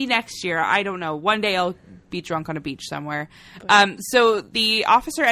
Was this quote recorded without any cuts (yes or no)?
yes